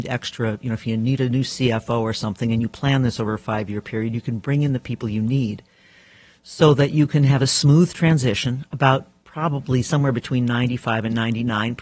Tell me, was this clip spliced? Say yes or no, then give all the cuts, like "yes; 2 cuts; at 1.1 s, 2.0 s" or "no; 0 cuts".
no; 0 cuts